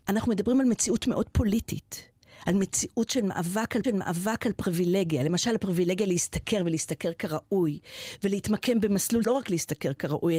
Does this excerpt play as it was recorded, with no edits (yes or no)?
no